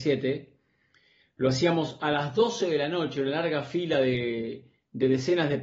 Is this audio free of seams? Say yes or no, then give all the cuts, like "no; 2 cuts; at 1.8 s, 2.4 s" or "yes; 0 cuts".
yes; 0 cuts